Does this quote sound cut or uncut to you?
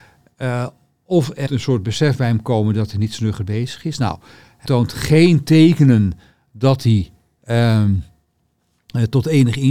cut